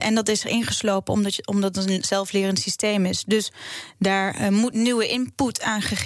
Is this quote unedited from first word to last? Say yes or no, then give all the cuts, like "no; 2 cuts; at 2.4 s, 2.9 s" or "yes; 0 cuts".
yes; 0 cuts